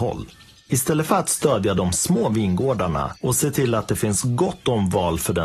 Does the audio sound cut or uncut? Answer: uncut